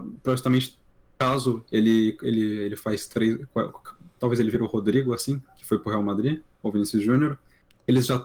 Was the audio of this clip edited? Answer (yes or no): no